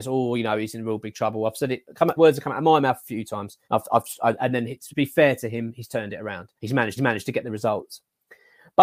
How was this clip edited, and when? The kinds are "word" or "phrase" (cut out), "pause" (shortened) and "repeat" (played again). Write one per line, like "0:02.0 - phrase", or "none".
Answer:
0:02.2 - word
0:03.6 - pause
0:04.9 - word
0:06.6 - pause
0:07.0 - repeat

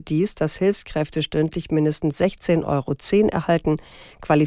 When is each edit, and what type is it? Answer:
none

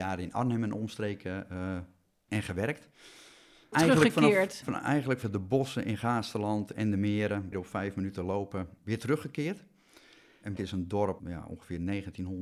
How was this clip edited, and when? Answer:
0:02.3 - word
0:03.7 - word
0:04.6 - word
0:05.2 - word
0:07.5 - word
0:08.8 - word
0:10.6 - word
0:11.2 - word

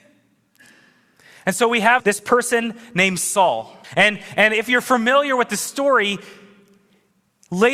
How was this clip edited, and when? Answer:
0:02.0 - word
0:03.8 - pause

